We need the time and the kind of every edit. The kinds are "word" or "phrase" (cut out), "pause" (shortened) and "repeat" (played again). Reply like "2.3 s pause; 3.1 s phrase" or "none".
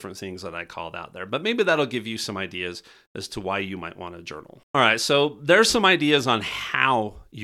4.6 s pause